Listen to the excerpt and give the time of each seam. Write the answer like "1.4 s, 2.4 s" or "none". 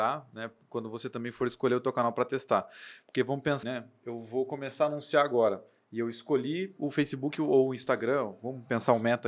3.6 s